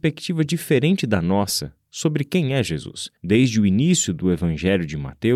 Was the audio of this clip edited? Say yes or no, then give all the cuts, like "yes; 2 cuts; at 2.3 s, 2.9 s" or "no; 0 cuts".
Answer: yes; 1 cut; at 3.2 s